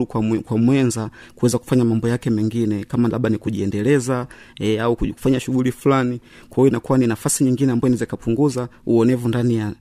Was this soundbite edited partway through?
no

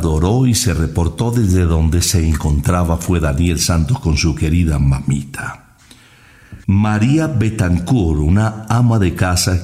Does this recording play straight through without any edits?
no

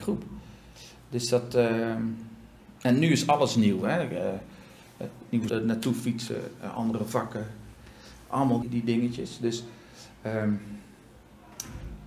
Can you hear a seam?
yes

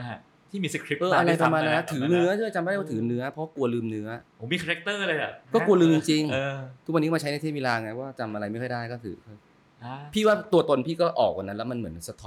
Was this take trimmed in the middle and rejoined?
yes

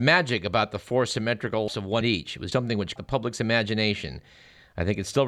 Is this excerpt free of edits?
no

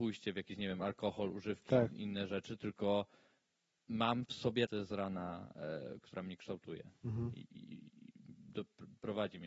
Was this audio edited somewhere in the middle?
yes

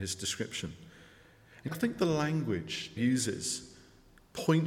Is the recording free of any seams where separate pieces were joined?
no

